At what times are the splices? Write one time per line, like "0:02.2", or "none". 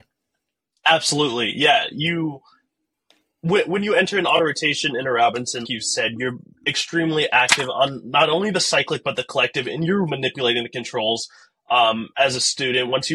0:05.6
0:10.1